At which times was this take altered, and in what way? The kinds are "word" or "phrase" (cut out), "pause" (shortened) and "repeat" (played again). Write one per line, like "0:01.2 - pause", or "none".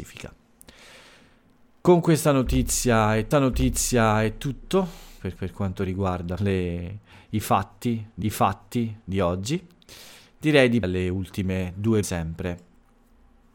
0:03.3 - repeat
0:05.4 - repeat
0:06.4 - phrase
0:08.2 - repeat
0:10.8 - word
0:12.0 - phrase